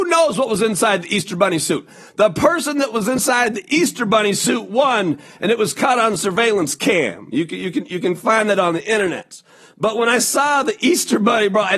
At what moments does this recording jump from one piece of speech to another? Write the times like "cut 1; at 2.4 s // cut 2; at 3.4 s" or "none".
none